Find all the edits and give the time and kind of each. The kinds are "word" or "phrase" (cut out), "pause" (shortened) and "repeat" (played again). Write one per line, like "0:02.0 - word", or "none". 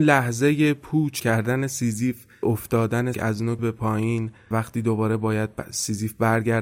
0:01.2 - word
0:02.4 - word
0:03.1 - word
0:03.6 - word
0:04.5 - word